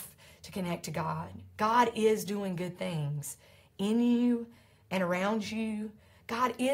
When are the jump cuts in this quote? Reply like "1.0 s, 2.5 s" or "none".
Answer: none